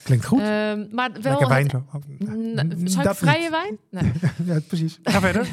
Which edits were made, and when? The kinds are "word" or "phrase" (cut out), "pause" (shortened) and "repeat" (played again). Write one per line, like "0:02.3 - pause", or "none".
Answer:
0:01.7 - word